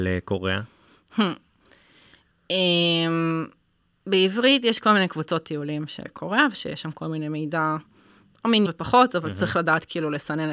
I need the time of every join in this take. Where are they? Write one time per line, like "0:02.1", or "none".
0:06.0
0:08.7

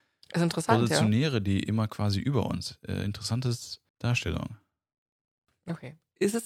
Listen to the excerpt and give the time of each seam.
0:03.9

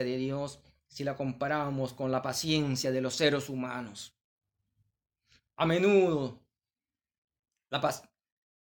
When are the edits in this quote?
none

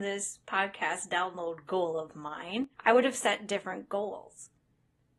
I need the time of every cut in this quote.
0:02.7

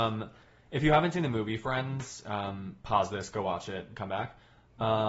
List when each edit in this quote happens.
0:02.8

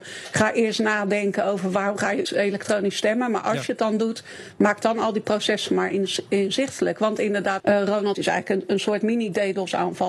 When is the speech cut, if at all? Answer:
0:02.2
0:07.6
0:08.1

